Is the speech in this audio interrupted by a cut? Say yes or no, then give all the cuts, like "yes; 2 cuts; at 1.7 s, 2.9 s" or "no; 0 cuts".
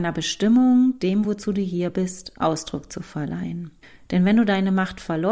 no; 0 cuts